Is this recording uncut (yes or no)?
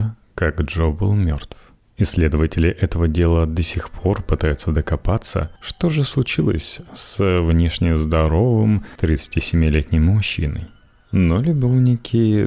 no